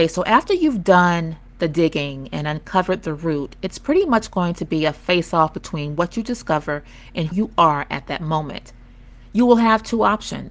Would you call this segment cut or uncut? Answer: cut